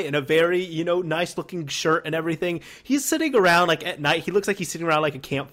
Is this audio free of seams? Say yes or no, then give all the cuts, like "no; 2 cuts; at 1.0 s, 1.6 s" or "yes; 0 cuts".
yes; 0 cuts